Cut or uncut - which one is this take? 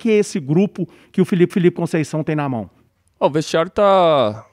cut